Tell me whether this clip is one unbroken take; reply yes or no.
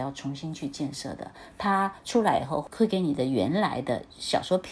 yes